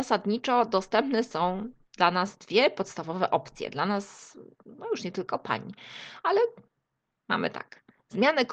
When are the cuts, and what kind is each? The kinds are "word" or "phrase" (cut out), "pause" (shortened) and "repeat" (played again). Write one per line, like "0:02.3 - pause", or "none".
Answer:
none